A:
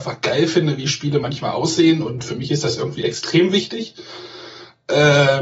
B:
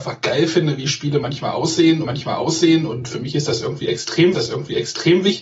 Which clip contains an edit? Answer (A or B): B